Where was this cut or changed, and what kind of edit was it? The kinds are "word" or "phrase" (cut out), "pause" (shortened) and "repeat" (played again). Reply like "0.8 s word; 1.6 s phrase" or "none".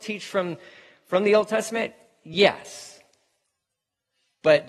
none